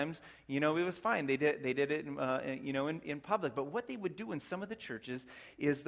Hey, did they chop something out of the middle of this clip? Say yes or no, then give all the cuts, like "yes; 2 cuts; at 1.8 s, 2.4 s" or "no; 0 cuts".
no; 0 cuts